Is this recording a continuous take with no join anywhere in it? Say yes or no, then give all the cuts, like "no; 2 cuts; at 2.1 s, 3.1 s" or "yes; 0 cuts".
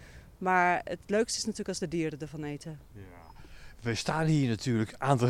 yes; 0 cuts